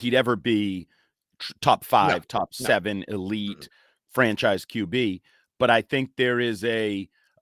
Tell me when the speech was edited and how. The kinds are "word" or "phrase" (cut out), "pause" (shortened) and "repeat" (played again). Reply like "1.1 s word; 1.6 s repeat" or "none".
none